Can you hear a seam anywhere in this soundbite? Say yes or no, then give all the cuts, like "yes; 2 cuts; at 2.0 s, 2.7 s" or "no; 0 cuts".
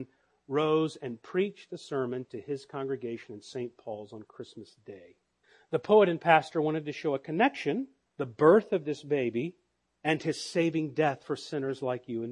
yes; 2 cuts; at 5.4 s, 8.1 s